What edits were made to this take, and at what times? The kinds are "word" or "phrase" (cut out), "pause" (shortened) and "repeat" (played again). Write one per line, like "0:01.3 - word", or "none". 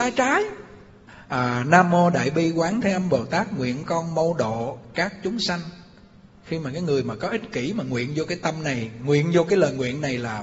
none